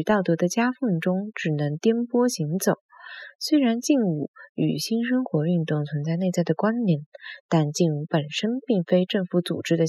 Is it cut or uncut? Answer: uncut